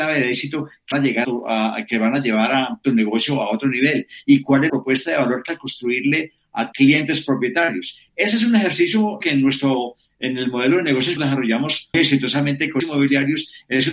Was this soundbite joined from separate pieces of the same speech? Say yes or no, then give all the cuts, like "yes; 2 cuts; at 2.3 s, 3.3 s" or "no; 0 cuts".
yes; 9 cuts; at 0.9 s, 1.2 s, 4.7 s, 5.5 s, 6.7 s, 9.2 s, 11.2 s, 11.9 s, 12.8 s